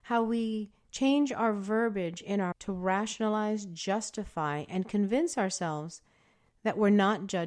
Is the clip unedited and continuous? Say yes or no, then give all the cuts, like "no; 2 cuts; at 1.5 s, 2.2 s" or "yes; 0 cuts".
no; 1 cut; at 2.5 s